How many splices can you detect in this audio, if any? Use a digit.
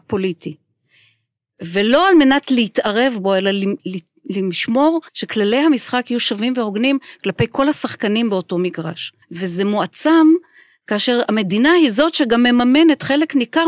2